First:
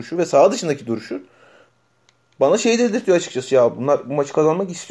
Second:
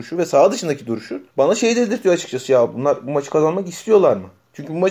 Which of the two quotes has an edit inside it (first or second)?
second